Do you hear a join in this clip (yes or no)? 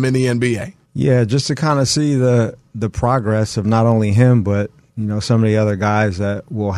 no